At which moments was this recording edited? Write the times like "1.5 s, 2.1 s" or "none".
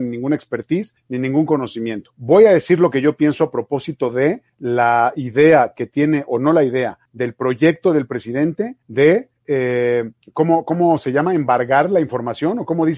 none